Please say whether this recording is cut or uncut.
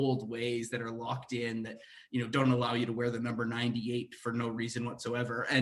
uncut